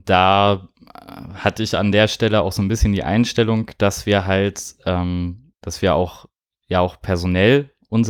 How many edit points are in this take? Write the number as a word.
zero